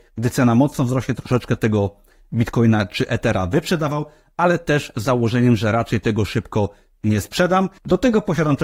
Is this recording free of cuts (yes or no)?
yes